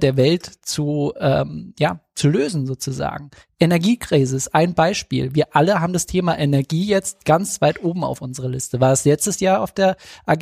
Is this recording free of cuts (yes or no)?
yes